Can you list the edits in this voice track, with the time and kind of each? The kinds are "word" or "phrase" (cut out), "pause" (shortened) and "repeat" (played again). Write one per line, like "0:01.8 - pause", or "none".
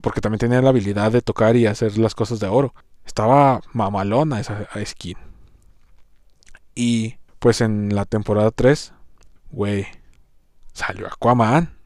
0:02.8 - pause
0:07.3 - pause
0:09.4 - pause